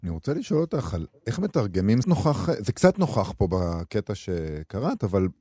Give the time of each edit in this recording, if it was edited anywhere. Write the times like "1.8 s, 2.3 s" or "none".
2.0 s